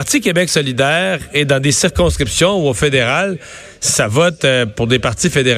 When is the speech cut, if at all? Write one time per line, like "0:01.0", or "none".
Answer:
none